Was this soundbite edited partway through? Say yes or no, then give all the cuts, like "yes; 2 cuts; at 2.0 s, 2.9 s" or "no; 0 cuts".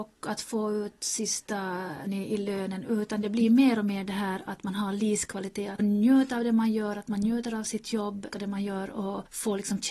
yes; 3 cuts; at 2.1 s, 5.8 s, 8.3 s